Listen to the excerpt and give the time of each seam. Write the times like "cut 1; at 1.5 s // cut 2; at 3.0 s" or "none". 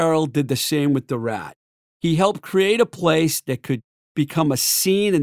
none